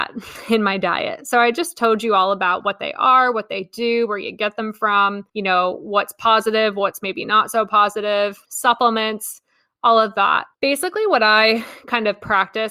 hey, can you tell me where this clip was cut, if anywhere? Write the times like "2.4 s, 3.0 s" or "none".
5.3 s, 8.4 s, 10.5 s